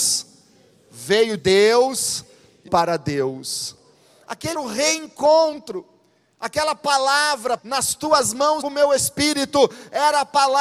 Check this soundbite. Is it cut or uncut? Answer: cut